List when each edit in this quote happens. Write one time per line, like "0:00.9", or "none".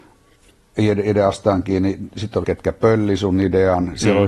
0:02.4